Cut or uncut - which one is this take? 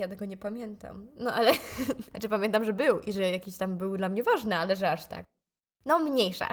uncut